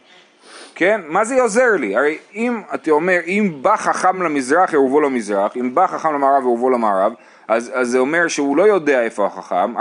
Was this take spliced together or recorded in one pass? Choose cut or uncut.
uncut